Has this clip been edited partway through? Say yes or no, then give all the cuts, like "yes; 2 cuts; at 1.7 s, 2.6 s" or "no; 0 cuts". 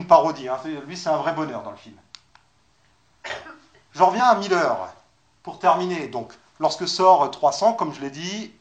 no; 0 cuts